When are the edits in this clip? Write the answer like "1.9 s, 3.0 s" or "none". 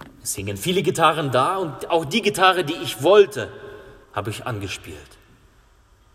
4.0 s